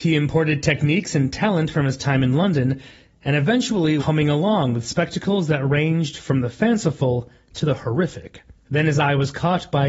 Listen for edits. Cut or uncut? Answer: cut